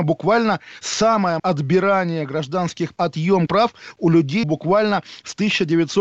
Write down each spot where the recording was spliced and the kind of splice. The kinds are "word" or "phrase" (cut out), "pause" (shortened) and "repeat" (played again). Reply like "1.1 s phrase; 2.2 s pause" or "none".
1.4 s word; 2.9 s word; 3.5 s word; 4.4 s word